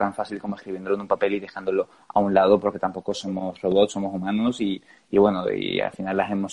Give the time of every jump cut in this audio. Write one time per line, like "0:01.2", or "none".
none